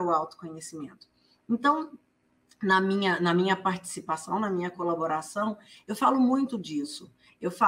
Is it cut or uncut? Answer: uncut